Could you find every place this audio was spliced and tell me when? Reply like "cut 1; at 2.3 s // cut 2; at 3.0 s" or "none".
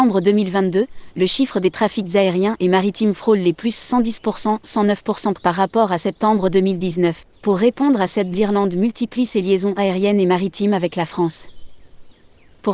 cut 1; at 5.3 s // cut 2; at 7.3 s // cut 3; at 8.3 s